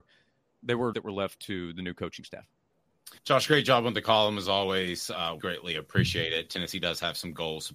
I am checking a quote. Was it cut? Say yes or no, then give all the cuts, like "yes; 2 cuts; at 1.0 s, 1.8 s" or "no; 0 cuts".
yes; 3 cuts; at 0.9 s, 3.2 s, 5.4 s